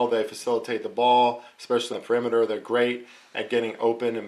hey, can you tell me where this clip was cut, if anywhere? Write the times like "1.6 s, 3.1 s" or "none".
1.9 s